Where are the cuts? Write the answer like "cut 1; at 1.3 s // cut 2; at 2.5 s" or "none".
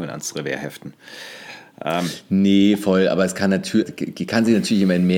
cut 1; at 3.8 s